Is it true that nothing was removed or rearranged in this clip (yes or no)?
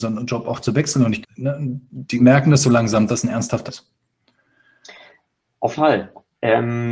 no